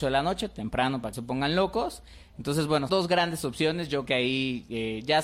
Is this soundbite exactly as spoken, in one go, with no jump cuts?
no; 3 cuts; at 1.1 s, 2.9 s, 4.0 s

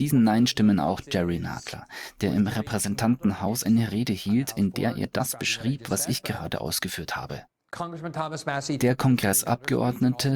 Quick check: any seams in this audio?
no; 0 cuts

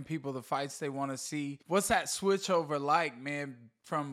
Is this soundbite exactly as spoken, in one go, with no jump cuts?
no; 1 cut; at 1.6 s

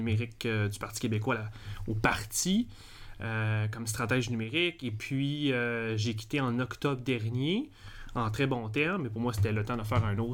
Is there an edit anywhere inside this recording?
no; 0 cuts

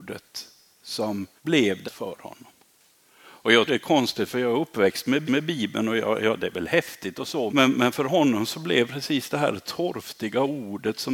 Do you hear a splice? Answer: yes; 5 cuts; at 1.4 s, 1.8 s, 3.7 s, 5.2 s, 7.5 s

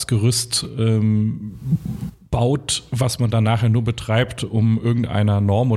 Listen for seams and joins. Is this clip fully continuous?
yes; 0 cuts

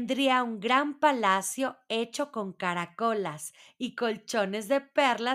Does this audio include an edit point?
no; 0 cuts

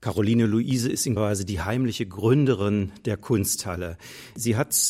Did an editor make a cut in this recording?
yes; 1 cut; at 1.2 s

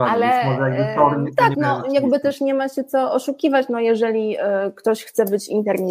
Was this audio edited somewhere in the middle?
yes; 1 cut; at 1.5 s

